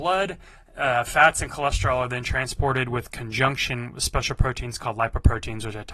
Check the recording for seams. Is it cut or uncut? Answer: uncut